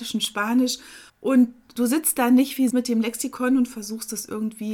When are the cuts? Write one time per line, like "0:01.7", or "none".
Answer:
0:01.1
0:02.7

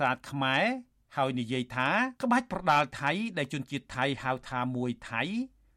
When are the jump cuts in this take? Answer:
0:02.2

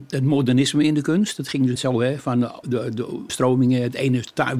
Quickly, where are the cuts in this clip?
0:01.8
0:02.6
0:03.3

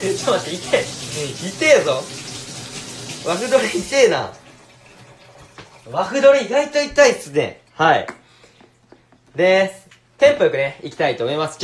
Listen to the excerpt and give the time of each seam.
0:07.7

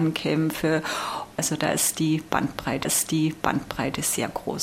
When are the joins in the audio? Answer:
0:02.8

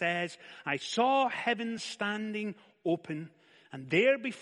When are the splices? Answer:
none

